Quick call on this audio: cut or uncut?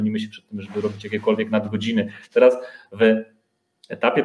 uncut